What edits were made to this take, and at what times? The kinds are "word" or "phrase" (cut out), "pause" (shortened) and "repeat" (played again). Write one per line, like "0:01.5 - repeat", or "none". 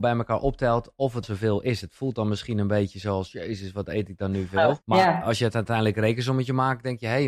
0:01.2 - word
0:04.8 - pause